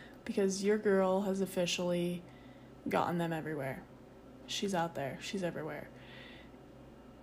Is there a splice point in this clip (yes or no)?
no